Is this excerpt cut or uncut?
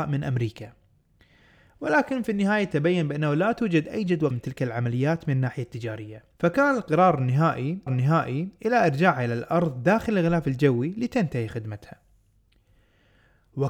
cut